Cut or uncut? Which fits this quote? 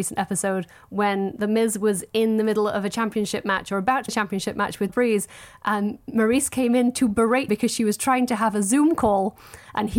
cut